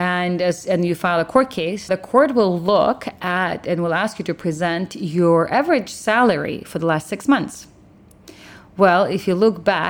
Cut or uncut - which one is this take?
cut